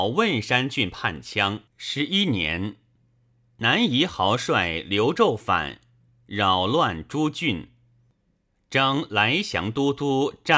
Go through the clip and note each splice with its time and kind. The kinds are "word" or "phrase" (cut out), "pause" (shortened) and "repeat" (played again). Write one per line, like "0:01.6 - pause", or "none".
0:01.7 - pause